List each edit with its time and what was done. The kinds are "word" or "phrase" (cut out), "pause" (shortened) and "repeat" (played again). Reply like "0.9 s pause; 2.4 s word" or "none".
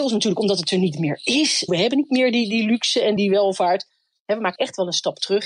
1.7 s word; 3.2 s word; 4.6 s word